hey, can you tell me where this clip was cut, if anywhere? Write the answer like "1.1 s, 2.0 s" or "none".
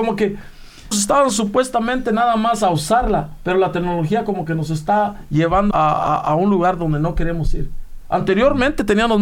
0.9 s, 5.7 s